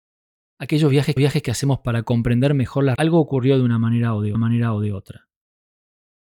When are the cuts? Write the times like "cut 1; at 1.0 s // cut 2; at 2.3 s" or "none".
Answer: cut 1; at 1.2 s // cut 2; at 3.0 s // cut 3; at 4.3 s